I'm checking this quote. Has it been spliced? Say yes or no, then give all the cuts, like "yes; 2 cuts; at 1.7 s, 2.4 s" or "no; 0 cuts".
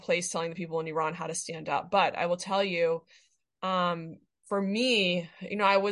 no; 0 cuts